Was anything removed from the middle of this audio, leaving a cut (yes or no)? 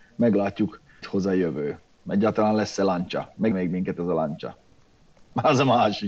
yes